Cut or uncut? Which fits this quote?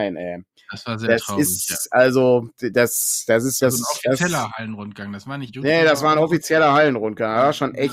cut